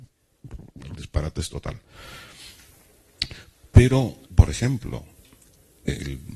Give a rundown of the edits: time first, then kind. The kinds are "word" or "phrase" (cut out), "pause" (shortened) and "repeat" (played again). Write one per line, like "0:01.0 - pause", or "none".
0:04.3 - word